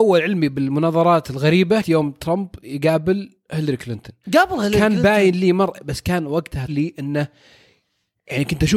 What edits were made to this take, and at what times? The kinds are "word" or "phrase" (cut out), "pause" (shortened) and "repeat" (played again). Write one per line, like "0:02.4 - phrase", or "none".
0:01.8 - word
0:04.2 - pause
0:06.7 - phrase